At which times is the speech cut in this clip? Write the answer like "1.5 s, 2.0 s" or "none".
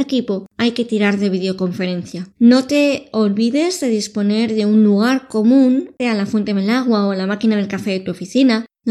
2.3 s, 6.0 s